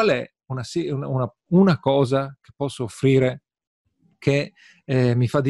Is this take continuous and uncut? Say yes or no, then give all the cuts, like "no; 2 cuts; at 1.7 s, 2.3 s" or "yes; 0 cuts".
yes; 0 cuts